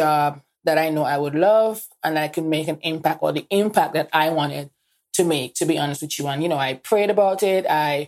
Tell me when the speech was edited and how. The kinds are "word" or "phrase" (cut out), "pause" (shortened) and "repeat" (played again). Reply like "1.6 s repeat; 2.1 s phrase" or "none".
none

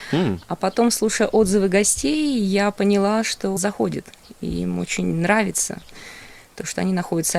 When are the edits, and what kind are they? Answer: 3.6 s phrase

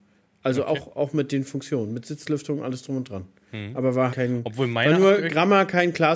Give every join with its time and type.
4.1 s word

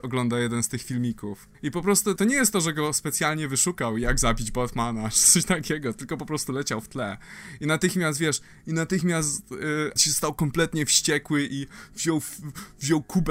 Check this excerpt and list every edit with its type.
1.5 s pause; 2.2 s word; 10.0 s word

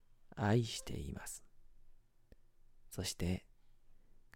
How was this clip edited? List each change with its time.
none

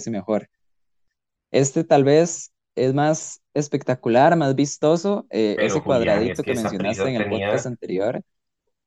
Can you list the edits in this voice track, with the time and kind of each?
none

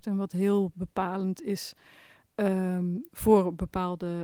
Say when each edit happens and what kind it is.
none

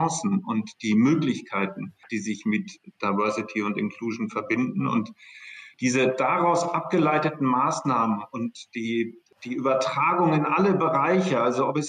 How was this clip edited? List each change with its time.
2.0 s pause; 5.7 s pause

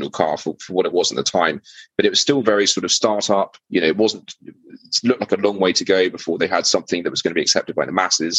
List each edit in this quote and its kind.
3.6 s pause

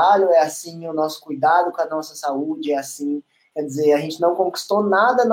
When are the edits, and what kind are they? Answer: none

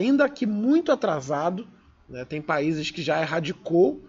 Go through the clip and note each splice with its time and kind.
none

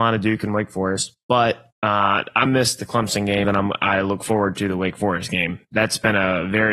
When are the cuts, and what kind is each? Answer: 1.7 s pause; 2.5 s word; 3.4 s word

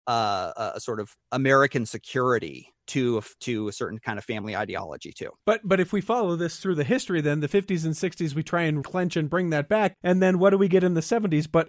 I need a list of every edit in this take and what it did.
1.2 s pause; 2.8 s pause; 5.4 s pause; 8.8 s word; 10.0 s pause

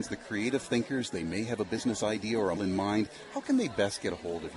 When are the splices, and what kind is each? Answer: 2.6 s word

